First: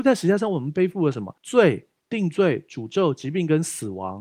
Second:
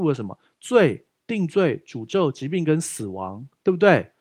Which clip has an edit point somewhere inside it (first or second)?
first